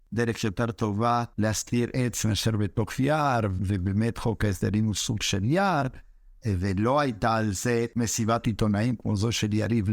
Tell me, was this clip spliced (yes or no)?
no